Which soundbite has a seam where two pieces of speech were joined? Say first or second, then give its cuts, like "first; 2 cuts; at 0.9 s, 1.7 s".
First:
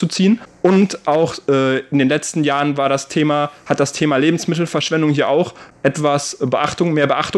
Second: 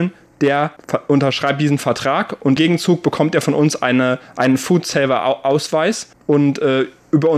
second; 1 cut; at 2.6 s